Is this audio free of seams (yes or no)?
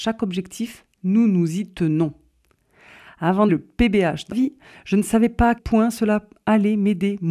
no